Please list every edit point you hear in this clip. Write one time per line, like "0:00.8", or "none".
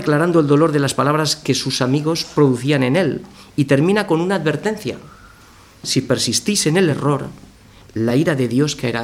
none